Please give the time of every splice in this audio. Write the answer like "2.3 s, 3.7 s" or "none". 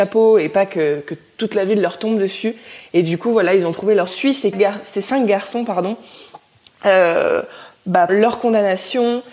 4.1 s, 4.5 s, 8.1 s